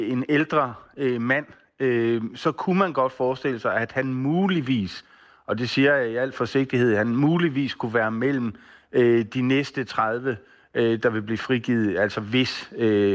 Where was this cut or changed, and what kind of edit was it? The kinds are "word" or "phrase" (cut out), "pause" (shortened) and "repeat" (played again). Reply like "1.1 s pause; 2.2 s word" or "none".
none

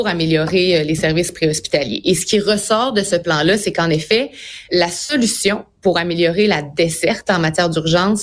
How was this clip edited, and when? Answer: 4.7 s word

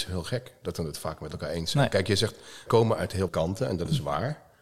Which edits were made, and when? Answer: 2.7 s word; 3.3 s word

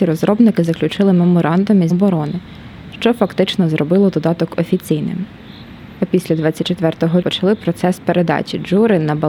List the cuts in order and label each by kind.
1.9 s word; 7.2 s word

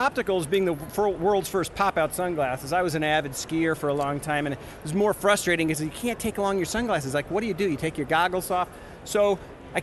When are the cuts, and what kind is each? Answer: none

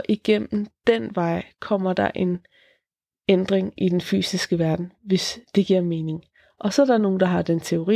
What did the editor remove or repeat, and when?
none

